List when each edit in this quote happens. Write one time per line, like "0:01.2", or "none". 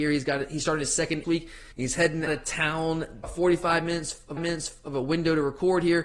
0:01.2
0:01.7
0:02.3
0:03.2
0:04.4